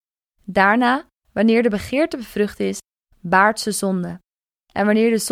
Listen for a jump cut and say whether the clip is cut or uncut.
uncut